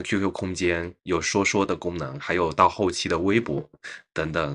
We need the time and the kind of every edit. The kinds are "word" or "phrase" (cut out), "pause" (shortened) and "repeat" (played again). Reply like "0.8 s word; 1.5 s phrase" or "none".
1.0 s pause